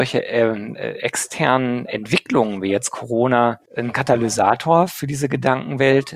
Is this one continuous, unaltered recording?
no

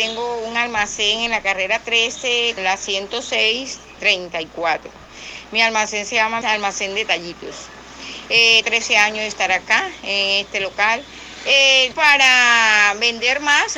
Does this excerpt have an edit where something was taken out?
yes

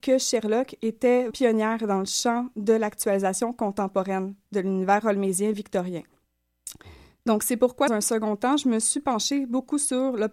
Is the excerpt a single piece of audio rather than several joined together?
no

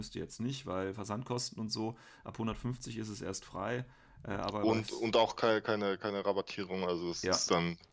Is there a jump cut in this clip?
no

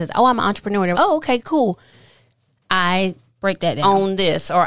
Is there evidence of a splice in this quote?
yes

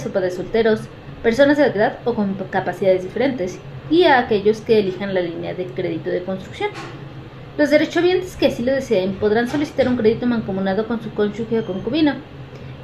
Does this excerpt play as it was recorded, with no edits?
no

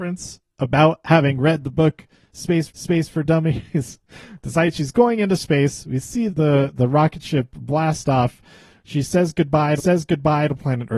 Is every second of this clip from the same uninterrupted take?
no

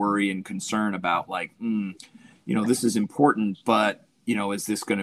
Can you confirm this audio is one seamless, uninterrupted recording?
yes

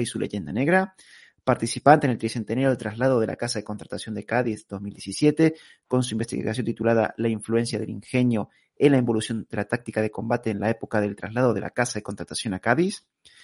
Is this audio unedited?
yes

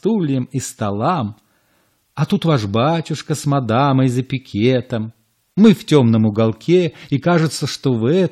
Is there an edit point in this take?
no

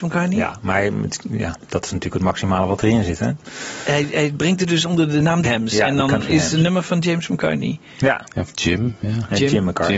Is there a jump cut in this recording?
yes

